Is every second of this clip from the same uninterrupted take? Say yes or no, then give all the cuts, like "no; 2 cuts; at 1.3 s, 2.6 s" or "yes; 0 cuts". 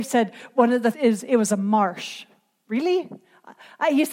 no; 1 cut; at 0.9 s